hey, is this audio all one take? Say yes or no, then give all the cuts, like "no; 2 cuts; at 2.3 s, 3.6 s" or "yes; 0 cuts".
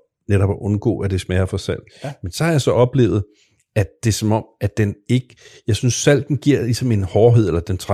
yes; 0 cuts